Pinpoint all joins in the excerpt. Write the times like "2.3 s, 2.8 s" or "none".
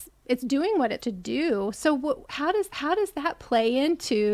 1.0 s, 2.7 s